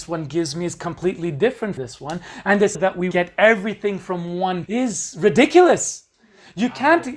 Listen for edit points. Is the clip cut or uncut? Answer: cut